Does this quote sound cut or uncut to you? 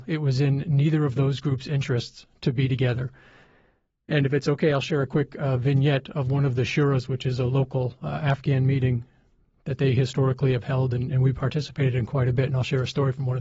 uncut